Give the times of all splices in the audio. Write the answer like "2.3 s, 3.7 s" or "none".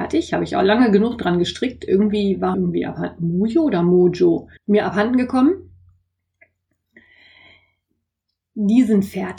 2.5 s, 4.6 s